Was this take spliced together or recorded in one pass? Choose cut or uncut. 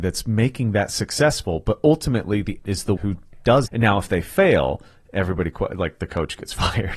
cut